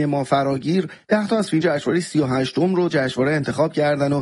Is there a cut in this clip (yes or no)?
yes